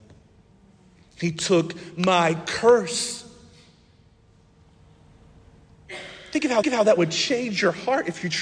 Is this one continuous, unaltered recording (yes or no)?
no